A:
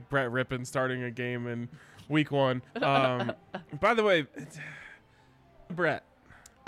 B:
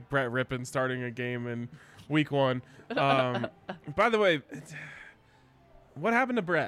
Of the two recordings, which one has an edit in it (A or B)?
A